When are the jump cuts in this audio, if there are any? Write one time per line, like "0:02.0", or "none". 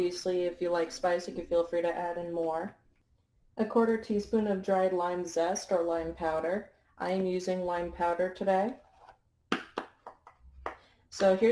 none